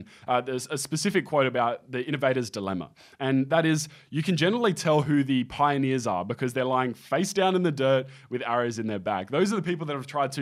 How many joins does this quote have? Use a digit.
0